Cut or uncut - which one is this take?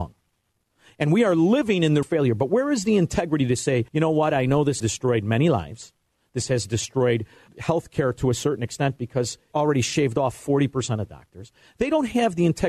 cut